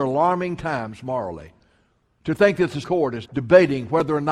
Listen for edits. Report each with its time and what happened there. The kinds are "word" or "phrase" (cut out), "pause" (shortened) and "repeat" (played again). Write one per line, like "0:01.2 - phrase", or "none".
0:02.8 - word
0:03.2 - word